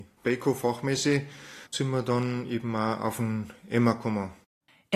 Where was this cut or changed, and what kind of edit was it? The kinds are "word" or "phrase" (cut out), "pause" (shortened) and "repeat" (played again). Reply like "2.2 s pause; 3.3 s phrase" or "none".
1.7 s pause